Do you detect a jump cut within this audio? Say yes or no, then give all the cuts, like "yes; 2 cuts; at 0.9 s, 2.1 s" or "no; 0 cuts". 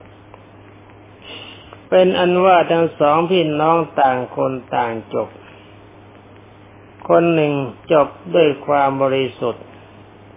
yes; 1 cut; at 1.8 s